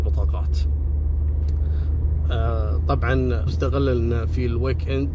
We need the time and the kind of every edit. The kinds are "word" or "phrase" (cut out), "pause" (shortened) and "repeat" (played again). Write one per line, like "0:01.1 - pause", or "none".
0:03.5 - word